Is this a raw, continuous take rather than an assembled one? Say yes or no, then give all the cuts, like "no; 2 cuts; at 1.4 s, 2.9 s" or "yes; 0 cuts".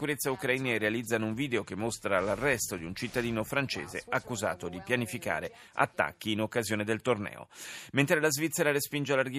yes; 0 cuts